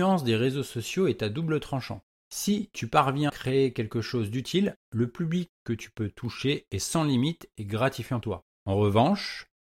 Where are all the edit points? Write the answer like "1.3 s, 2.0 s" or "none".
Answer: 3.3 s, 4.8 s, 8.2 s